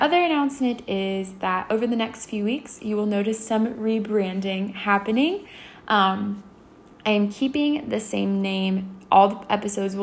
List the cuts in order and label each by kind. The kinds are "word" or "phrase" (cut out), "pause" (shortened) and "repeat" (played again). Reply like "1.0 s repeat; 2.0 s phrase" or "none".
none